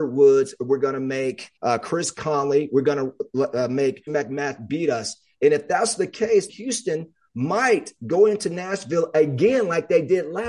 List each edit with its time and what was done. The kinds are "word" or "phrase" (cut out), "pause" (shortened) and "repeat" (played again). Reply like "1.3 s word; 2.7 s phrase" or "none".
1.6 s pause; 4.1 s word; 6.5 s word